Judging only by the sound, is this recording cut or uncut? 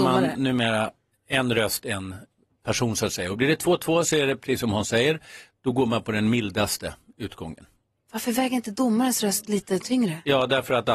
uncut